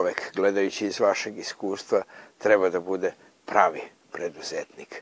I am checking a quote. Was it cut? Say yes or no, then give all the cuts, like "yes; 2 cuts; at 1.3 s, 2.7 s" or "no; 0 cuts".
no; 0 cuts